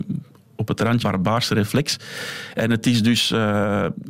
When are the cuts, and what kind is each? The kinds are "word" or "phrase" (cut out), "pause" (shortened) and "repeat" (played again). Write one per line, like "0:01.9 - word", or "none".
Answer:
0:01.0 - word